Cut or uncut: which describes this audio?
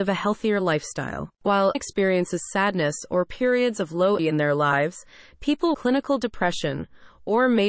cut